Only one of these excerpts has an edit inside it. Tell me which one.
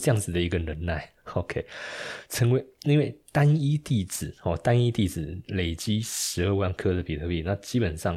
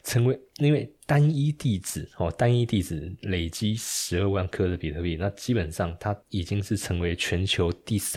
second; 1 cut; at 6.2 s

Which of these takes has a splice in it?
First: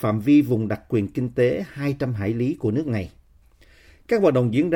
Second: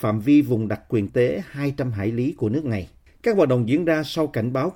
second; 2 cuts; at 1.1 s, 3.1 s

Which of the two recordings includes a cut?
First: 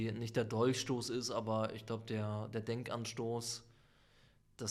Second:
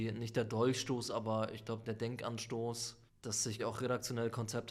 second; 4 cuts; at 1.1 s, 1.8 s, 3.1 s, 3.6 s

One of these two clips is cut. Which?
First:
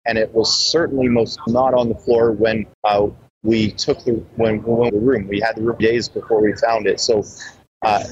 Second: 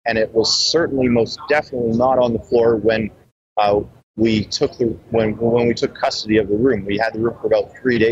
first; 4 cuts; at 1.5 s, 2.7 s, 4.9 s, 5.8 s

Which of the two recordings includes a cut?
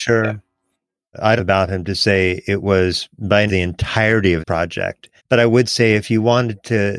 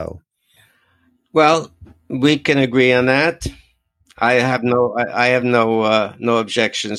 first; 4 cuts; at 1.4 s, 3.5 s, 4.4 s, 5.2 s

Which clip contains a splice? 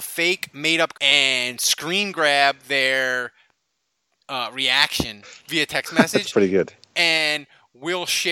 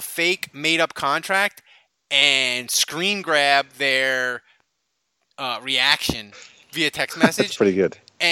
first; 2 cuts; at 0.9 s, 5.4 s

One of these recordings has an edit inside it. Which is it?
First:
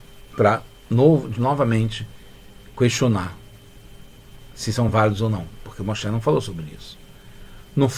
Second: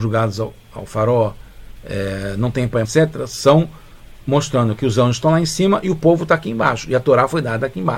second; 1 cut; at 2.8 s

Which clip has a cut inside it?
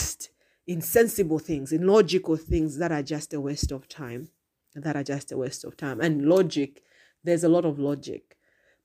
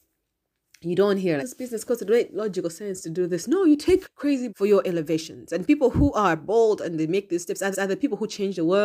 second; 4 cuts; at 1.4 s, 4.0 s, 4.5 s, 7.7 s

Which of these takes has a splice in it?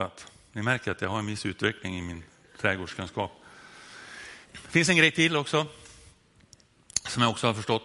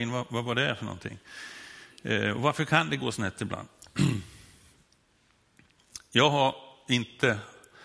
first; 1 cut; at 4.4 s

